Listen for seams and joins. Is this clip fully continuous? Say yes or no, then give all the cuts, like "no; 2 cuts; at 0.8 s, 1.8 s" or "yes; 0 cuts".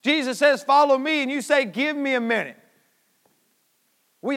yes; 0 cuts